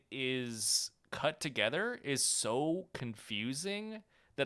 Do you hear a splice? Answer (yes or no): no